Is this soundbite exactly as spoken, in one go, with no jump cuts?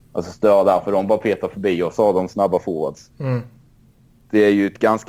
yes; 0 cuts

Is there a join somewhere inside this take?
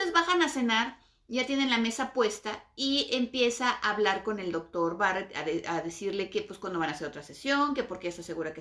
no; 0 cuts

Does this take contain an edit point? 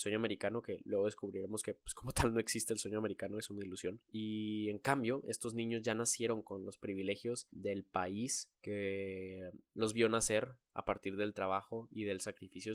no; 0 cuts

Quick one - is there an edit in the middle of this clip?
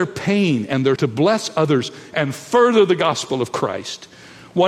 yes; 1 cut; at 1.0 s

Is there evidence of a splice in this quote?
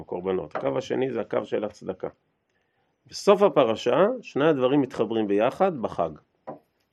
no; 0 cuts

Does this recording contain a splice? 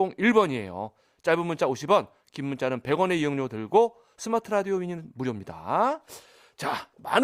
no; 0 cuts

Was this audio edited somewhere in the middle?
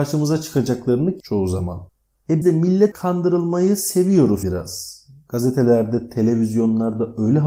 yes; 4 cuts; at 1.2 s, 2.4 s, 2.9 s, 4.4 s

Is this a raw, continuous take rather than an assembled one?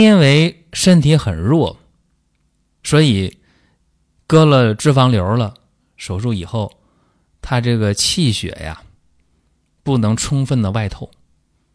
yes; 0 cuts

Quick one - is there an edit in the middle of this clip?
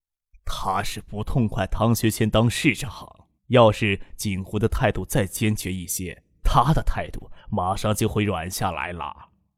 yes; 2 cuts; at 3.4 s, 7.4 s

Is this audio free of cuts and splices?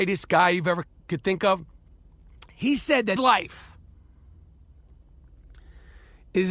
no; 1 cut; at 3.2 s

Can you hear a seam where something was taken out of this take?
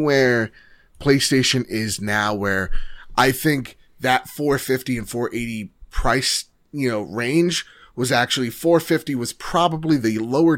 no; 0 cuts

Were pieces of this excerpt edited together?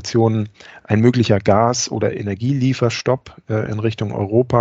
no; 0 cuts

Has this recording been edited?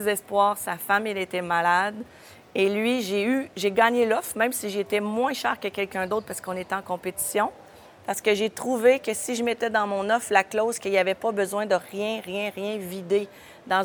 no; 0 cuts

